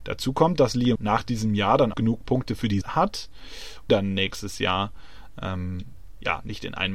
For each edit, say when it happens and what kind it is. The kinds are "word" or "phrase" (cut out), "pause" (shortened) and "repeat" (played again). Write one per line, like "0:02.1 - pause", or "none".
0:01.0 - word
0:01.9 - word
0:02.8 - word
0:03.9 - word